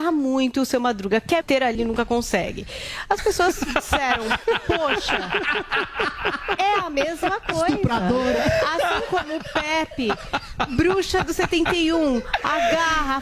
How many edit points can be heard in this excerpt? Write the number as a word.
two